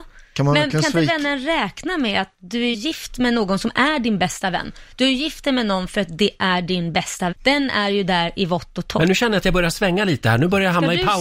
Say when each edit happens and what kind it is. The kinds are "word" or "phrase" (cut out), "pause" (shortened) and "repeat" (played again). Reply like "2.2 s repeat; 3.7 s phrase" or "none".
2.7 s word; 7.3 s word